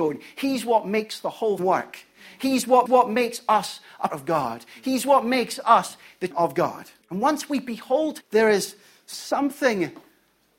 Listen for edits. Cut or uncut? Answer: cut